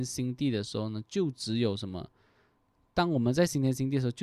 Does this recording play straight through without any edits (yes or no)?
yes